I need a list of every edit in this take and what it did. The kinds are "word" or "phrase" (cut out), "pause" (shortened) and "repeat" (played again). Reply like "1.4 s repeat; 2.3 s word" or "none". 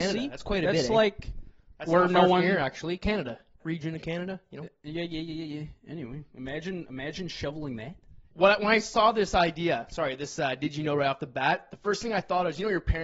3.6 s phrase